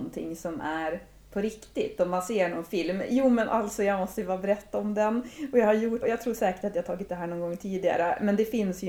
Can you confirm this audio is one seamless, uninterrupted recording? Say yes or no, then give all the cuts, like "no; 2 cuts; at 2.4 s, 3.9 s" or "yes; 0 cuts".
no; 2 cuts; at 6.0 s, 7.1 s